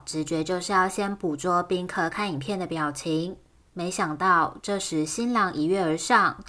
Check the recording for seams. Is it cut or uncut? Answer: uncut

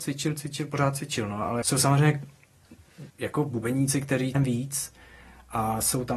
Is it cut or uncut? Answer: cut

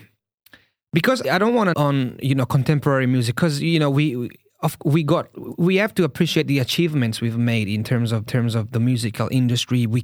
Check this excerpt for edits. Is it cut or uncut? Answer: cut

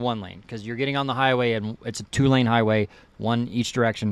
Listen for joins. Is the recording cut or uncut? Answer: uncut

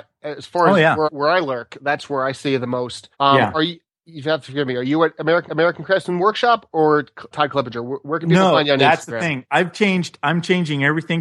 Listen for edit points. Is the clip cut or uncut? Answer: cut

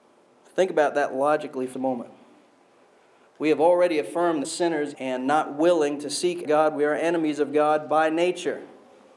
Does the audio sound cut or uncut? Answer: cut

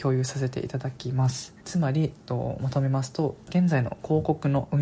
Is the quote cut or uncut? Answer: cut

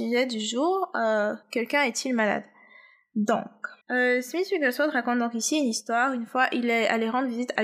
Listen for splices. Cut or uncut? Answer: cut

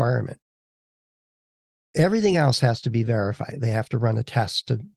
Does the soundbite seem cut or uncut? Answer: uncut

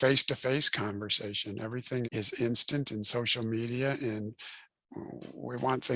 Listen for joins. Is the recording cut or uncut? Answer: cut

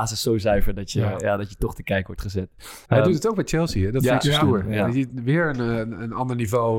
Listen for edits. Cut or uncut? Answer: cut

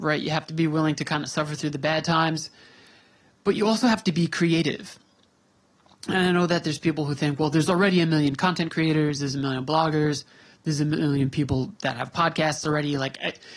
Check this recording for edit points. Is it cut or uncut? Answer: uncut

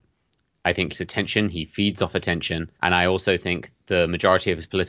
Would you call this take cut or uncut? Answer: cut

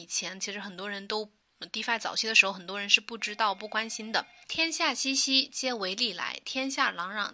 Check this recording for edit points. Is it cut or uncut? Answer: uncut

